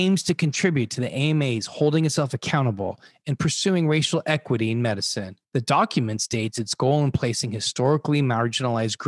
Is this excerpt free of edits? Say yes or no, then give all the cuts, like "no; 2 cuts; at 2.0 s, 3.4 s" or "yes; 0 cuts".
no; 1 cut; at 5.4 s